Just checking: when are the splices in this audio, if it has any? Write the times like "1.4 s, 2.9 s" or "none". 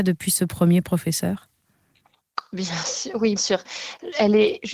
3.4 s